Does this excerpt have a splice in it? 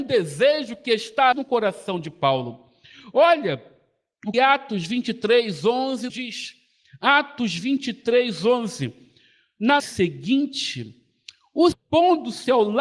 yes; 5 cuts; at 1.3 s, 4.3 s, 6.1 s, 9.8 s, 11.7 s

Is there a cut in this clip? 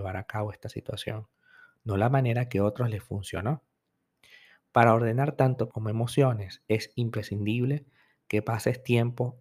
yes; 1 cut; at 5.7 s

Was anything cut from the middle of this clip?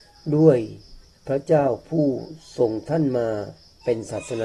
yes; 1 cut; at 1.0 s

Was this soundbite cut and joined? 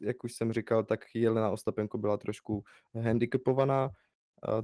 no; 0 cuts

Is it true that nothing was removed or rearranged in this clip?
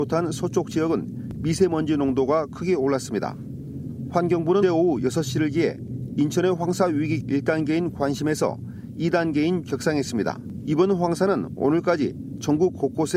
no; 3 cuts; at 4.6 s, 7.2 s, 9.6 s

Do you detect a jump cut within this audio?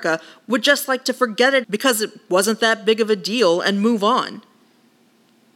yes; 1 cut; at 1.6 s

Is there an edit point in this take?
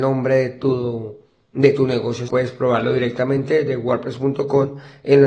yes; 1 cut; at 2.3 s

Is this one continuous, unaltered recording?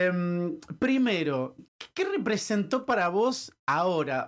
no; 1 cut; at 1.7 s

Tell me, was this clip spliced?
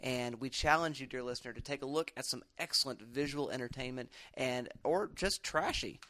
no; 0 cuts

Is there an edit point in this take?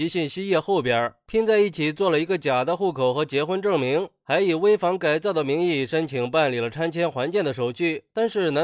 no; 0 cuts

